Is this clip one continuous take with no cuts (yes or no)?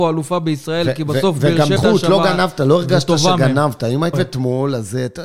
no